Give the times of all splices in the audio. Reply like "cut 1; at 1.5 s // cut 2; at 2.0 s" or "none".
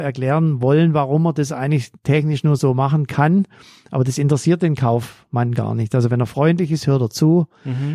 none

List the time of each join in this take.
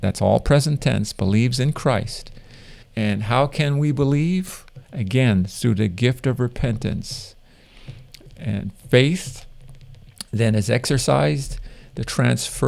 cut 1; at 2.8 s // cut 2; at 4.8 s

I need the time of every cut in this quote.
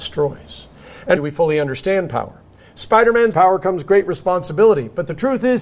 cut 1; at 1.2 s // cut 2; at 3.3 s

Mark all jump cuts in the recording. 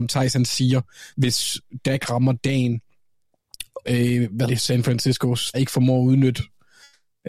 cut 1; at 3.8 s // cut 2; at 4.5 s // cut 3; at 5.5 s

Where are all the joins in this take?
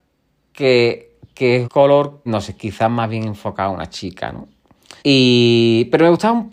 cut 1; at 1.6 s // cut 2; at 2.3 s // cut 3; at 5.0 s

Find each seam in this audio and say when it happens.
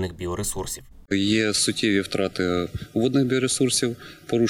cut 1; at 1.1 s

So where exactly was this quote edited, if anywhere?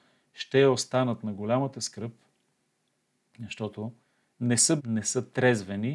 cut 1; at 4.0 s // cut 2; at 4.8 s

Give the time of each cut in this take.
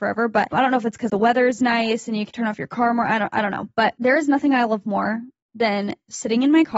cut 1; at 1.1 s // cut 2; at 2.3 s

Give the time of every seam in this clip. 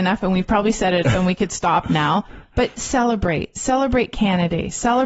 cut 1; at 1.0 s

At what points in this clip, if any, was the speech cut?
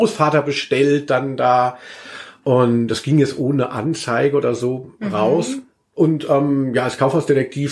none

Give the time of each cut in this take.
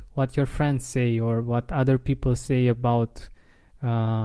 none

